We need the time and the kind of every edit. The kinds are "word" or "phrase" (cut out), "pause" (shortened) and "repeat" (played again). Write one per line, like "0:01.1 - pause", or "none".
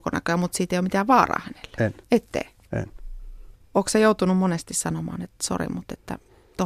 0:02.0 - pause
0:03.6 - pause

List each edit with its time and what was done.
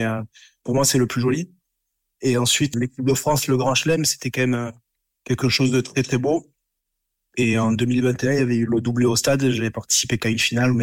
0:02.7 - word

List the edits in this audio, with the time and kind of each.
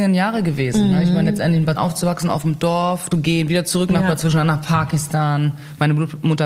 0:01.8 - word
0:03.1 - phrase

